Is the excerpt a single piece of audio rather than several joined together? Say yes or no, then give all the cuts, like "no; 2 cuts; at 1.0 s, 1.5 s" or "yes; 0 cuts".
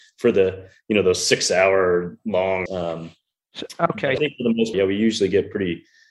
no; 3 cuts; at 2.7 s, 4.2 s, 4.7 s